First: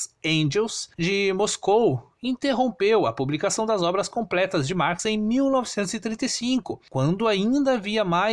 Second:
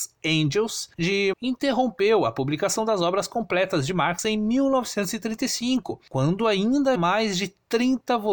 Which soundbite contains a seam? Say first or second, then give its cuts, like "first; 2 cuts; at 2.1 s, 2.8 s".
second; 2 cuts; at 1.3 s, 7.0 s